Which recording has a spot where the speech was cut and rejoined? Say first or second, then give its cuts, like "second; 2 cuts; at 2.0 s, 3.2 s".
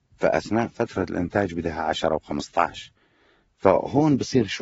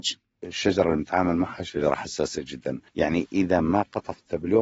second; 1 cut; at 2.9 s